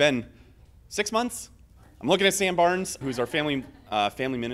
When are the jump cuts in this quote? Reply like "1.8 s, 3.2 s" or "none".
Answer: 3.0 s